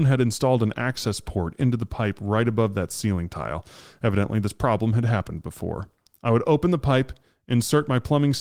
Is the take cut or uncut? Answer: uncut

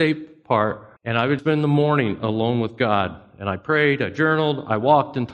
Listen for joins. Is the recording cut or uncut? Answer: cut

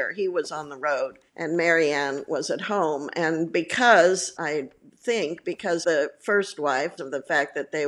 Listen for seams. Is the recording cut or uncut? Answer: cut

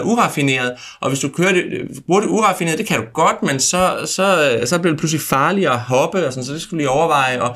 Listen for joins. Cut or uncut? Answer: uncut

